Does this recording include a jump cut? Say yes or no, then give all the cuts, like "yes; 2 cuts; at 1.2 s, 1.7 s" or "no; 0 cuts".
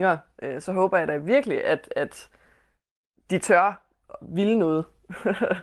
no; 0 cuts